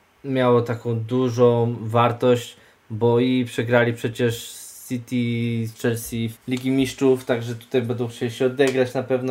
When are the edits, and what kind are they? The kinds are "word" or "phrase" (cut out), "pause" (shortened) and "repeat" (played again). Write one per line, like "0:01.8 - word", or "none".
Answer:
0:06.3 - word